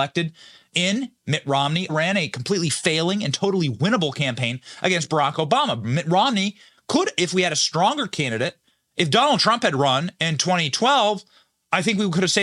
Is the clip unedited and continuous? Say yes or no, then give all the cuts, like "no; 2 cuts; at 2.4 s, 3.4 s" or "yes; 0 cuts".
no; 1 cut; at 1.9 s